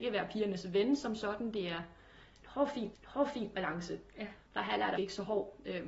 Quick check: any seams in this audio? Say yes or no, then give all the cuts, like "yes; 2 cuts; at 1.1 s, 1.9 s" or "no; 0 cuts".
yes; 3 cuts; at 2.9 s, 4.4 s, 5.0 s